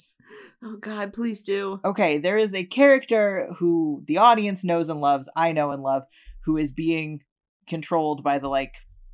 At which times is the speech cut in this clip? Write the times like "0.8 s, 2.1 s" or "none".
none